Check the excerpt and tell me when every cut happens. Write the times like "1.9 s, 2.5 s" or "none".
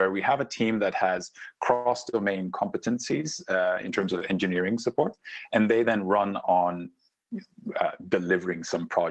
none

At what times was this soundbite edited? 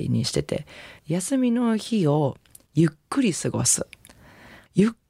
1.0 s

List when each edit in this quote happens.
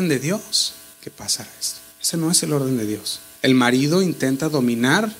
0.9 s, 1.9 s, 3.3 s

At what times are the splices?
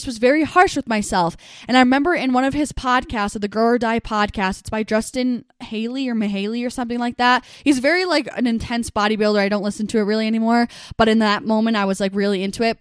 none

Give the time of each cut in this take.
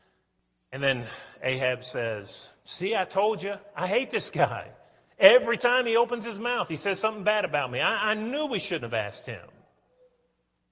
none

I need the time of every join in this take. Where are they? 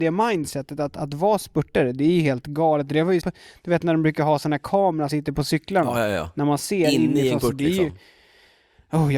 3.2 s, 5.1 s, 7.4 s

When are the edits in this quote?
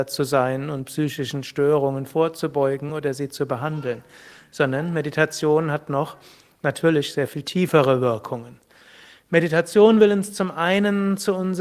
none

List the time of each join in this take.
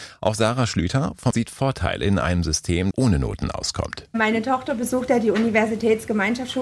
1.3 s, 2.9 s

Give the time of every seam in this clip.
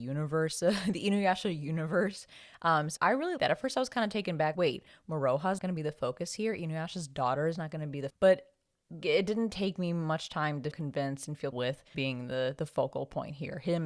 3.0 s, 3.4 s, 4.5 s, 5.6 s, 8.1 s, 9.0 s, 10.7 s, 11.5 s, 11.9 s

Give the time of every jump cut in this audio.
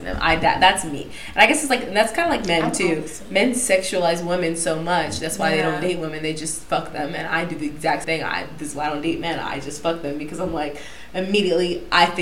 8.0 s

